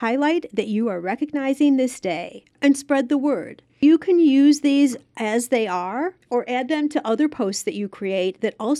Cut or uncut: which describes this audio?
cut